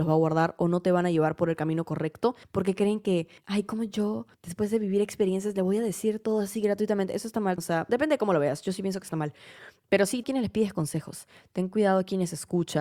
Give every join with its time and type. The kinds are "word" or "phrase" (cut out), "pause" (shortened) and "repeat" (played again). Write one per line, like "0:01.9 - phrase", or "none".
0:02.4 - pause
0:03.4 - pause
0:04.3 - pause
0:07.6 - word
0:07.9 - word
0:09.8 - word
0:10.2 - phrase